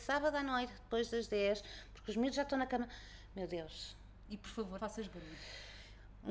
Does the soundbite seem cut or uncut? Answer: cut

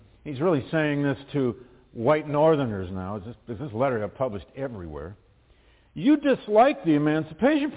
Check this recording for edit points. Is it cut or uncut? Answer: uncut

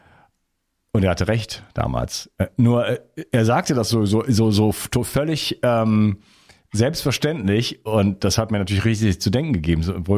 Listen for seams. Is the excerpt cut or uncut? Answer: uncut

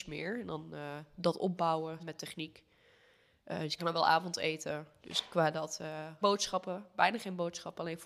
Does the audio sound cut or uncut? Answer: cut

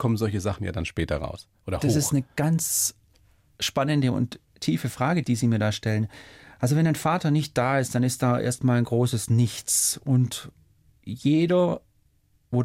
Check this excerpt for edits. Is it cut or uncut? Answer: uncut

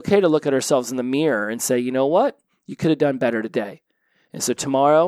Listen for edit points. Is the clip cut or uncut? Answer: uncut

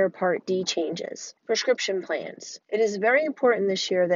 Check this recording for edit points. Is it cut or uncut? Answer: cut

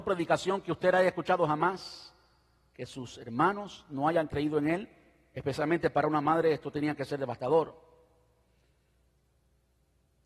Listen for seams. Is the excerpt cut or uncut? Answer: uncut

